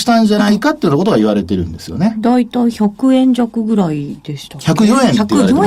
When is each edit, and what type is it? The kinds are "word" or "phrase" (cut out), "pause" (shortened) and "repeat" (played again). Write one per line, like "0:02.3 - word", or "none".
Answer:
none

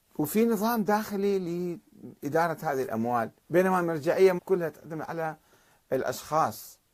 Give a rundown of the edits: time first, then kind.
0:03.4 - pause
0:04.4 - word

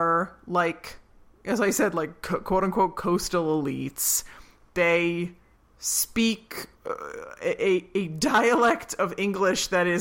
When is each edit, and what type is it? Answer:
0:06.7 - pause

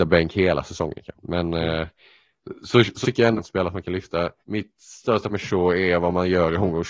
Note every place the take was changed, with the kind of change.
0:01.1 - pause
0:03.0 - word
0:03.4 - phrase
0:04.4 - pause
0:05.3 - word

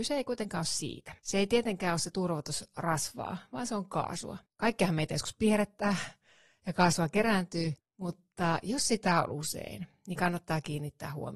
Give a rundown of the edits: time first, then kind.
0:01.2 - pause
0:04.5 - pause
0:07.8 - pause

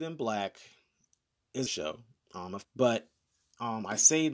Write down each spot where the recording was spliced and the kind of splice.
0:01.7 - phrase
0:02.6 - word

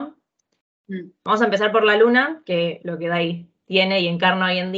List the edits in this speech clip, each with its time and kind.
0:02.8 - word

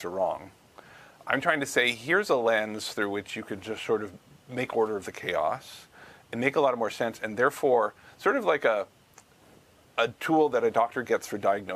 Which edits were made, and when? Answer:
none

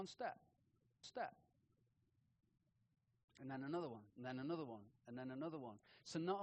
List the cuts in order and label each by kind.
0:01.0 - repeat
0:04.1 - pause

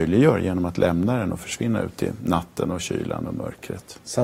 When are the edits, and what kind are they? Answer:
none

